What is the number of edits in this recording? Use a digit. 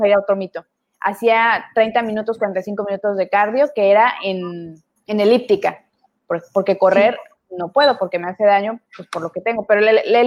2